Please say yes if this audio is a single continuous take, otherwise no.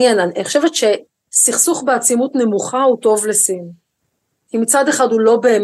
yes